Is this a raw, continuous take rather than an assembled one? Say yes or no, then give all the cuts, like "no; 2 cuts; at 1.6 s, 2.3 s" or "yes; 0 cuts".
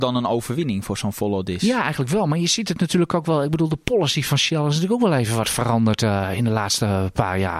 yes; 0 cuts